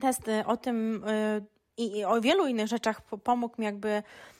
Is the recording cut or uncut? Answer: uncut